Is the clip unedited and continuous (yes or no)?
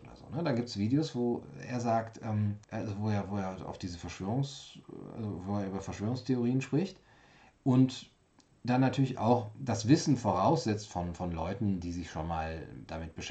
no